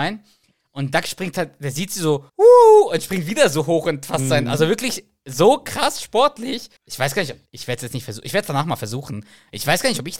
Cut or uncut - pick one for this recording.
cut